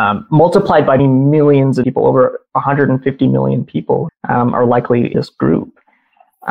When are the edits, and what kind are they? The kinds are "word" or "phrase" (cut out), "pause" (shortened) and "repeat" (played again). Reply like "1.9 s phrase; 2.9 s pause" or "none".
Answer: 1.0 s phrase; 1.8 s phrase; 4.1 s word; 5.1 s word